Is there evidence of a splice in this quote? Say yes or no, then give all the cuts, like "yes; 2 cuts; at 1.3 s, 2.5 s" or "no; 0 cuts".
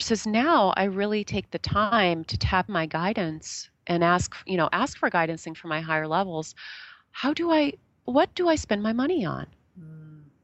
yes; 3 cuts; at 2.7 s, 5.5 s, 8.1 s